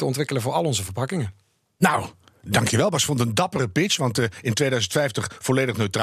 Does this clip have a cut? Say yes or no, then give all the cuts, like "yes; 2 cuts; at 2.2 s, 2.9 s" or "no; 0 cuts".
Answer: no; 0 cuts